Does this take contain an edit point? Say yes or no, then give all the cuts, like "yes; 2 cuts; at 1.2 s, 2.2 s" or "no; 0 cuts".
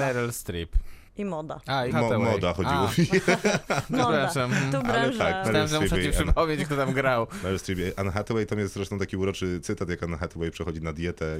yes; 2 cuts; at 1.1 s, 1.9 s